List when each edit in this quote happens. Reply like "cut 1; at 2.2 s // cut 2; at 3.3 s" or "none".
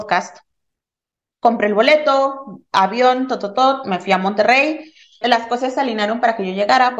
cut 1; at 5.2 s